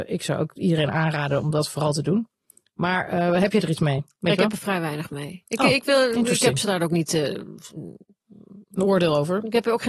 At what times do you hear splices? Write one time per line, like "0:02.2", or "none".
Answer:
none

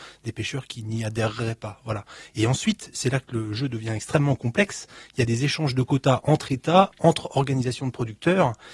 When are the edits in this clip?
none

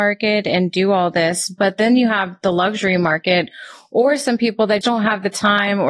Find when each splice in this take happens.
0:04.8

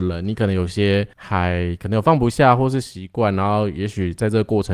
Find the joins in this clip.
0:01.1

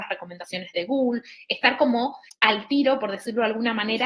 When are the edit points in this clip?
0:02.3

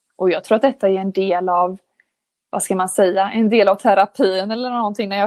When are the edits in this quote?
none

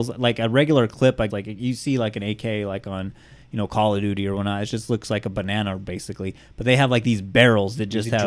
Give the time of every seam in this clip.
0:01.3

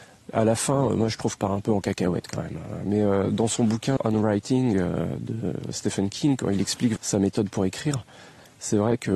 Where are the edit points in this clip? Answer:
0:01.4
0:04.0
0:07.0

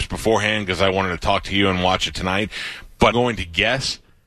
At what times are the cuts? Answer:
0:03.1

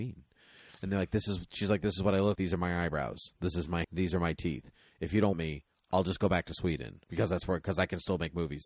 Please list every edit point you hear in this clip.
0:02.4
0:03.8
0:05.3
0:07.0

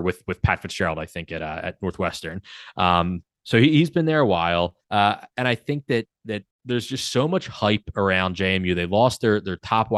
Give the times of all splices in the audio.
0:04.8
0:06.5

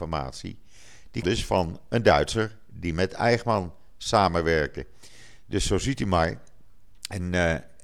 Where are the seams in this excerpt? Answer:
0:01.2

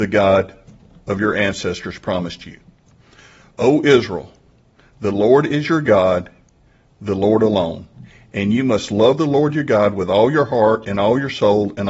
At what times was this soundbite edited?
none

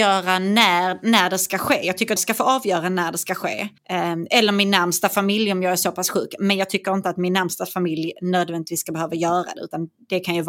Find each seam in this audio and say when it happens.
0:02.2
0:03.8

